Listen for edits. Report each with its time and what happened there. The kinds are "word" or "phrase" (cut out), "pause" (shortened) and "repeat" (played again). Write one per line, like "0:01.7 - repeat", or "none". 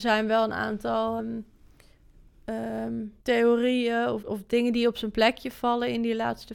0:01.2 - word
0:03.2 - pause
0:04.2 - word